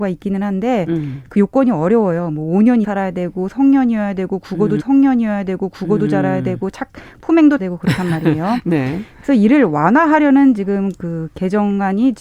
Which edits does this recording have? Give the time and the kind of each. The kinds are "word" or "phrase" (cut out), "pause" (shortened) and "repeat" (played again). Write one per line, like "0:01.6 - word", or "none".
0:02.8 - word
0:04.8 - repeat
0:07.6 - word